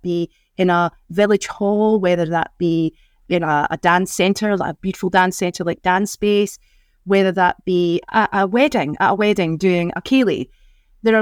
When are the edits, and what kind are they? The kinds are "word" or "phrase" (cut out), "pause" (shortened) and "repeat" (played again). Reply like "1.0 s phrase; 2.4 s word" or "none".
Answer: none